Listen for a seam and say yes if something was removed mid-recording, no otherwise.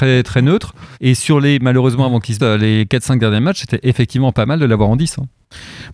yes